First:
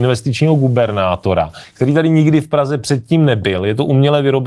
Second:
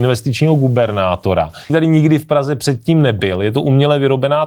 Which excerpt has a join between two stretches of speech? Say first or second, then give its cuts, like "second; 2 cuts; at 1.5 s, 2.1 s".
second; 1 cut; at 1.7 s